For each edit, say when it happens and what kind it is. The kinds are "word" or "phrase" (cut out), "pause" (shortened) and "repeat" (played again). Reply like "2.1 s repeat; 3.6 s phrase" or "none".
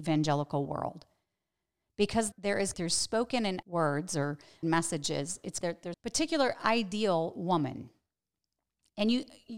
2.3 s word; 2.7 s word; 3.6 s word; 4.6 s word; 5.6 s word; 5.9 s word